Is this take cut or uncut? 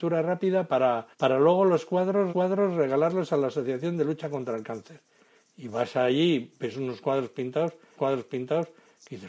cut